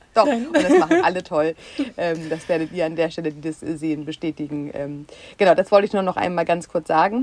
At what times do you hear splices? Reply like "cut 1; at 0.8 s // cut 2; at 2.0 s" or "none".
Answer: none